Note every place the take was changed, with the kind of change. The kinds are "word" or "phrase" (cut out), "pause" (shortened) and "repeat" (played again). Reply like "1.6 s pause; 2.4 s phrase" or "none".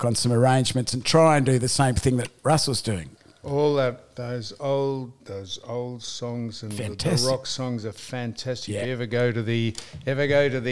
5.2 s pause